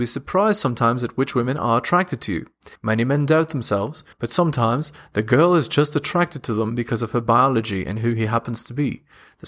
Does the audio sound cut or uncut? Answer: cut